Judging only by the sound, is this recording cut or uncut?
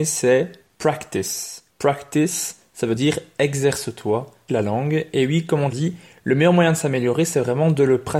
cut